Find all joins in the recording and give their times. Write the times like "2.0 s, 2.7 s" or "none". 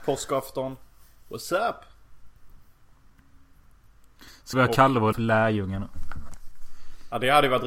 4.5 s, 5.1 s